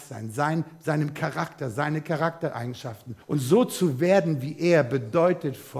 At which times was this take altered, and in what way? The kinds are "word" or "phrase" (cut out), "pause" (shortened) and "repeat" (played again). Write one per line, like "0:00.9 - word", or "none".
0:03.2 - pause